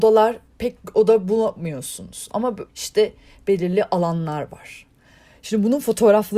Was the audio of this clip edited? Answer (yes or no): yes